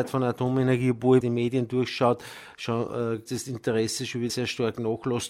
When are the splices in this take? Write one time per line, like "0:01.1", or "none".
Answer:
0:01.2
0:03.3
0:04.3